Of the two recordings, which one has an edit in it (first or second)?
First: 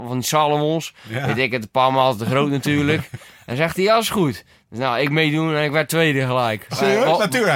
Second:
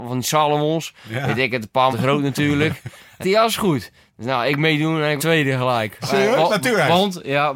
second